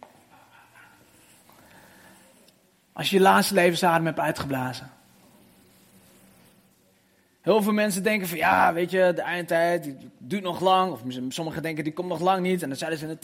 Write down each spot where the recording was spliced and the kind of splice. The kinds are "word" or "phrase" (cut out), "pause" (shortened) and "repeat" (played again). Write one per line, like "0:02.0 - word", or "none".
none